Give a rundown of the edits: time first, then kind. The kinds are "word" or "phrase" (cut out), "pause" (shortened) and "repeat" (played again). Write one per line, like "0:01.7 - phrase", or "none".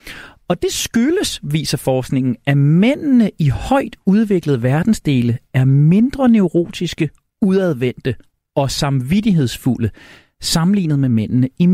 none